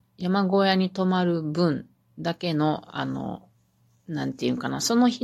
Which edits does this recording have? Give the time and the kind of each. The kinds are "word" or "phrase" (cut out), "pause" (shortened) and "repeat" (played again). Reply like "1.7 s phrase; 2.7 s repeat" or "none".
none